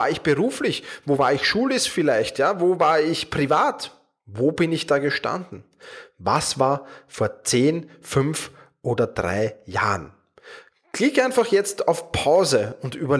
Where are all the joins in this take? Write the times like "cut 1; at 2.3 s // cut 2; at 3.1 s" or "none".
none